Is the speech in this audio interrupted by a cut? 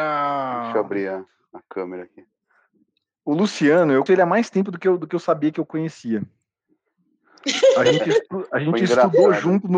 yes; 1 cut; at 4.1 s

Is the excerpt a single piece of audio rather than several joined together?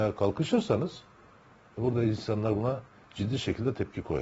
yes; 0 cuts

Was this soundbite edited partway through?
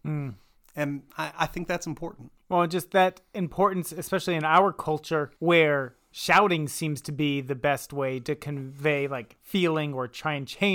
yes; 2 cuts; at 2.4 s, 5.4 s

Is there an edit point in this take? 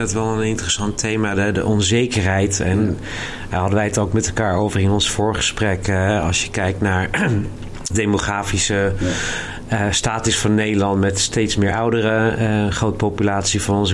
yes; 1 cut; at 7.9 s

